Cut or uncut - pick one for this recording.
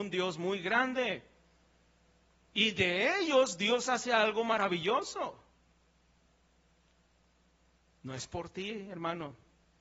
uncut